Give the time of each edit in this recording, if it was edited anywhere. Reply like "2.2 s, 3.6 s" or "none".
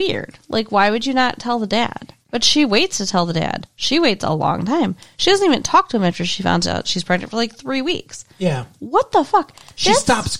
2.2 s, 8.3 s